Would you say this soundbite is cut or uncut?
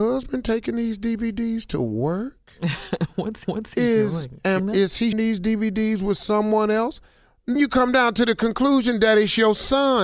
cut